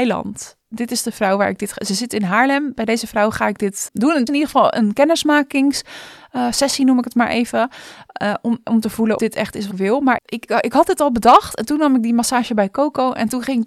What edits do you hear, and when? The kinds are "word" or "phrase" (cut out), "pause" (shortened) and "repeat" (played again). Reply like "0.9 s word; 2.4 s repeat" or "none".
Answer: 3.9 s word; 4.3 s word; 9.2 s word; 9.7 s word; 10.2 s word; 10.5 s word